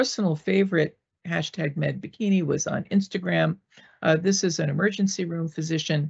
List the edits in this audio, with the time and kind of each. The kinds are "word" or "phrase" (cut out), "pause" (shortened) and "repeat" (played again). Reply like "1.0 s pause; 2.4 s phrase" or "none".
none